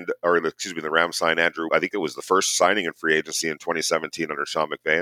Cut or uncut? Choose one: cut